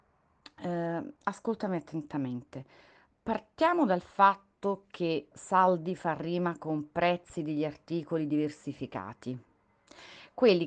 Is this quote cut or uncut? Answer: cut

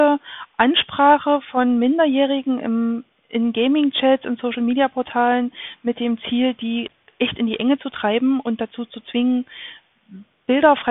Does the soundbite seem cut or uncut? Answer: uncut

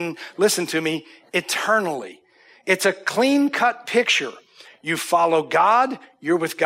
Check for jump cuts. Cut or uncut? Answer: uncut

